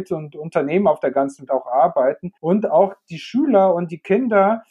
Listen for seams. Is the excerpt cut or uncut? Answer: cut